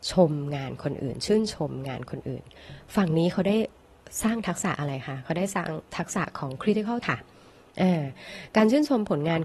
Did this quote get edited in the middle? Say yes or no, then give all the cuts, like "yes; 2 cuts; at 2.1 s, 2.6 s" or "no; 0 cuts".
yes; 1 cut; at 7.0 s